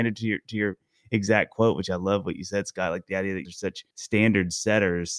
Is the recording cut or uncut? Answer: cut